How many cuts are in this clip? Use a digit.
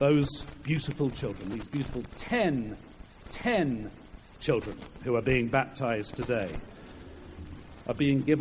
1